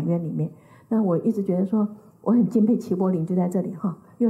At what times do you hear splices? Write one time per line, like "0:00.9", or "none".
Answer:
none